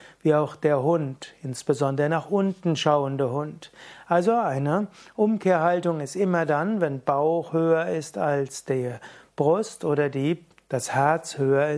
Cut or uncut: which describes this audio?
uncut